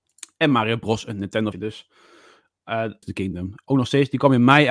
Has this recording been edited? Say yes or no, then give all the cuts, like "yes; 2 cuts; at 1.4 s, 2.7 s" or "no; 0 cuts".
yes; 2 cuts; at 1.5 s, 3.0 s